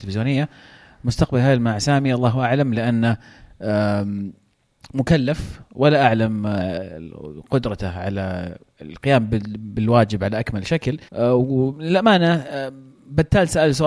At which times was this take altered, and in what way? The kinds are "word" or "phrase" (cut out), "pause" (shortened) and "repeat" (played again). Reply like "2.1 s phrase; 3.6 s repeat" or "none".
11.1 s pause